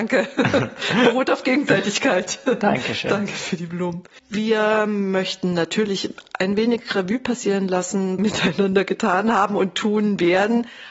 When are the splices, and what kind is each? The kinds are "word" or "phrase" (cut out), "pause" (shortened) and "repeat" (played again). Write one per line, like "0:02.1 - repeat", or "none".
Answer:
0:04.2 - pause
0:08.2 - phrase